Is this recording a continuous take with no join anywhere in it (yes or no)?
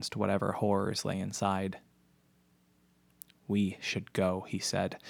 yes